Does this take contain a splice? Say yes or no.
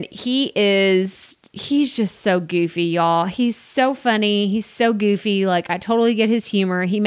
no